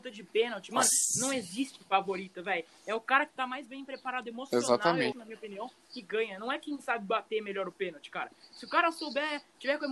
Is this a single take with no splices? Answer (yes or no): no